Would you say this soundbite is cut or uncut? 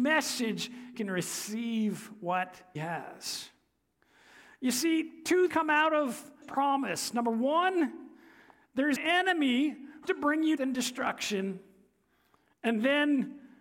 cut